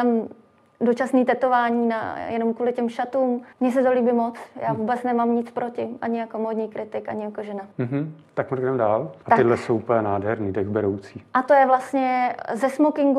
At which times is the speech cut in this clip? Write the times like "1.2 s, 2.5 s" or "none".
3.5 s, 7.7 s